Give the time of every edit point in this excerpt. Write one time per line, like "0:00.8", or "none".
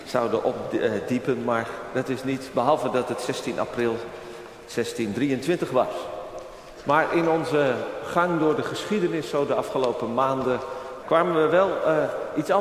0:11.0